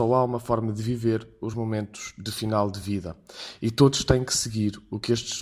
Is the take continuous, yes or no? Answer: yes